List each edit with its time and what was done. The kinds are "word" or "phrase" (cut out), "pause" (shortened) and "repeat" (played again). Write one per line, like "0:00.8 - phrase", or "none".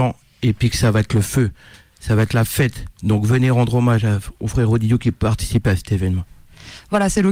none